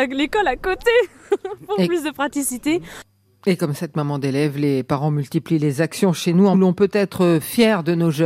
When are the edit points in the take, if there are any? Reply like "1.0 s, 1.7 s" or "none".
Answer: 6.5 s